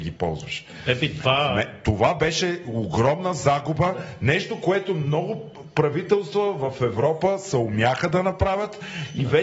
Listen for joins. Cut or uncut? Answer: uncut